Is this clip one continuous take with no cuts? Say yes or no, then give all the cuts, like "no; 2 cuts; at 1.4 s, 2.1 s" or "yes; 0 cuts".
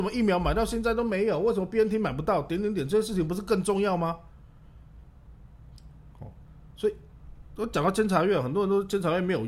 yes; 0 cuts